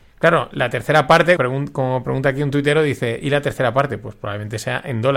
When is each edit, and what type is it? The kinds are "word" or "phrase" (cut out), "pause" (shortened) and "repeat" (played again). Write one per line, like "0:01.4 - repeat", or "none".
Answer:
0:01.4 - word